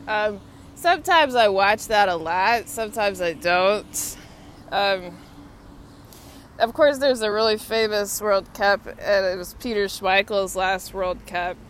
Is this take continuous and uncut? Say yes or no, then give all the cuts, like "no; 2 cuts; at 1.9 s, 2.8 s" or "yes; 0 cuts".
yes; 0 cuts